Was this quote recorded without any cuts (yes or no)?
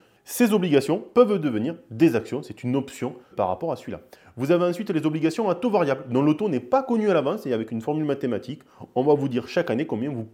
no